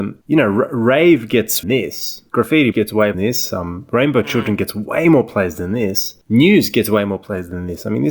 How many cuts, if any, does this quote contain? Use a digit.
3